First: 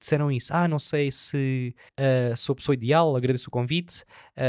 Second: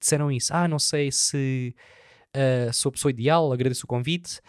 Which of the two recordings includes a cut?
first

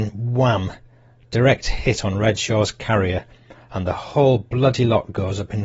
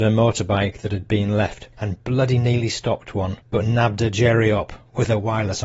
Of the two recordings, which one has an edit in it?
second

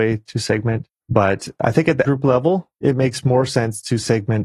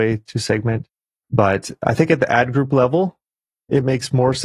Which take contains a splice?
first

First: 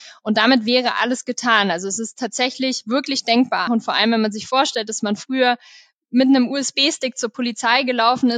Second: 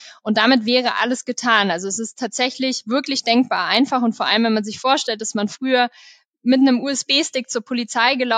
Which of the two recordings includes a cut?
first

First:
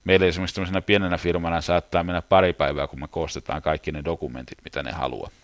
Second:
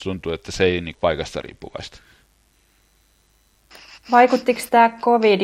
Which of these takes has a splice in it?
second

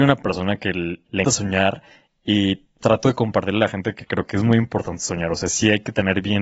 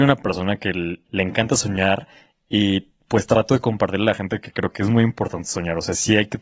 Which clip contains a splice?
first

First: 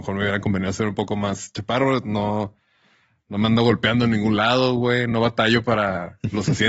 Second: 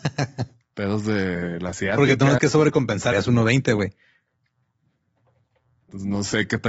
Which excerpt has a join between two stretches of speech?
second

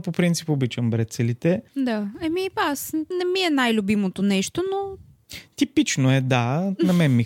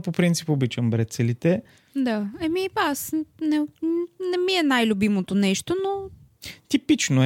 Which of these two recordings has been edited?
first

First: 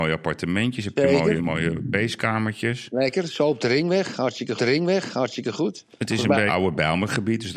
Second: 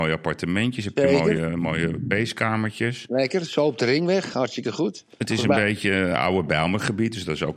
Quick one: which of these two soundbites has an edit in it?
first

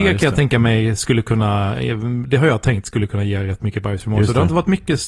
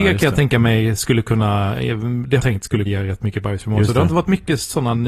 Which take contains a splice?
second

